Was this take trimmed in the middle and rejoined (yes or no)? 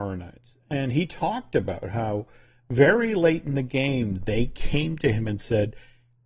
no